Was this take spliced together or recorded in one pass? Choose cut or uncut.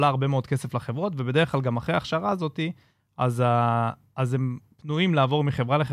uncut